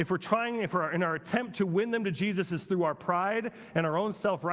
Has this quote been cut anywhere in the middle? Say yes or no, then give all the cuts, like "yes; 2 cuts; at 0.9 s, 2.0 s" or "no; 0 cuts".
no; 0 cuts